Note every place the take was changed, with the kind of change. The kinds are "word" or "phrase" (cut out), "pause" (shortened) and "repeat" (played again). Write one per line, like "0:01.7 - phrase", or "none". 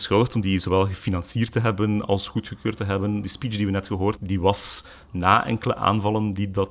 0:04.2 - word